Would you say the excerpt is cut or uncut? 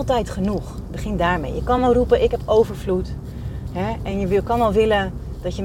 uncut